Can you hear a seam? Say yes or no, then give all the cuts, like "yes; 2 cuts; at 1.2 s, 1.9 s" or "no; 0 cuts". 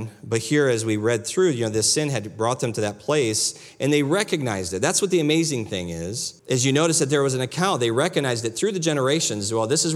yes; 1 cut; at 6.4 s